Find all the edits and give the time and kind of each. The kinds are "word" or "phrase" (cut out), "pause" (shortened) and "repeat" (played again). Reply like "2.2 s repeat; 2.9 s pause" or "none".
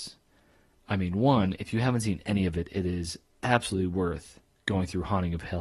none